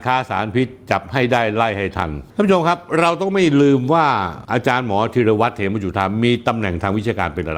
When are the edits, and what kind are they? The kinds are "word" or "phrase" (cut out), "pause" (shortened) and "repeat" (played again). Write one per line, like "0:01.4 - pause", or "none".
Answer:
0:02.3 - pause